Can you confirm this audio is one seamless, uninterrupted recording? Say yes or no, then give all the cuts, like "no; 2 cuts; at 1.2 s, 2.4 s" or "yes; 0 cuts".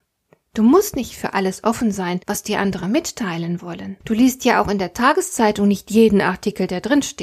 no; 2 cuts; at 2.2 s, 4.0 s